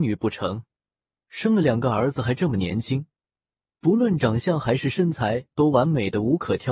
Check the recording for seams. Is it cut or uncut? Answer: uncut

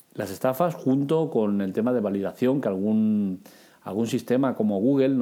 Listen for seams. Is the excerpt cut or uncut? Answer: uncut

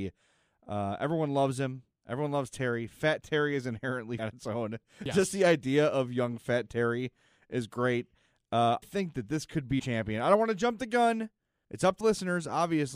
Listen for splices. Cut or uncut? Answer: cut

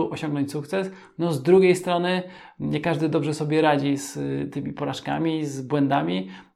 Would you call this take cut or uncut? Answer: uncut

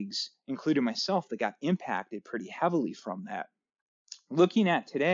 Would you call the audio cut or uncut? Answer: uncut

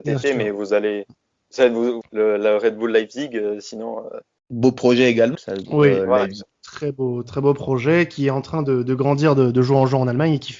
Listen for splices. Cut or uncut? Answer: cut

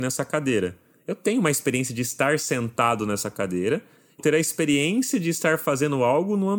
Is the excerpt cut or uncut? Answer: cut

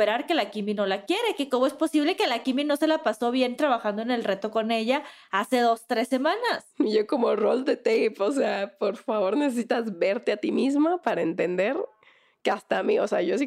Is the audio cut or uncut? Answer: uncut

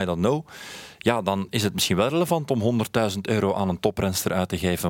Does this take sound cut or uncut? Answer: uncut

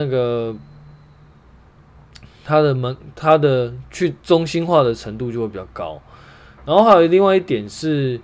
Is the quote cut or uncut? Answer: uncut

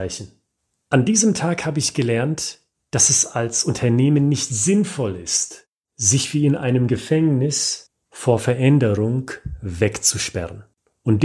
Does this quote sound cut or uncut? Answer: uncut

